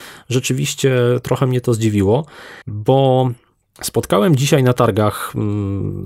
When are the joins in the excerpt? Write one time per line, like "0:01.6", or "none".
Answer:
0:02.6